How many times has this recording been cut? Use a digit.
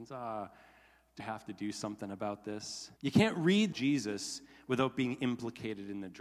3